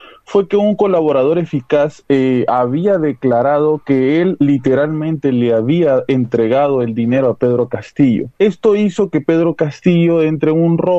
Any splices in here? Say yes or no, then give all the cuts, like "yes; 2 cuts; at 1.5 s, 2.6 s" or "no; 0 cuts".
yes; 1 cut; at 8.3 s